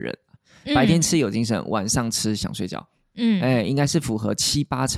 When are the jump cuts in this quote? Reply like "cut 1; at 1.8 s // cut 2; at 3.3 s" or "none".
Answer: none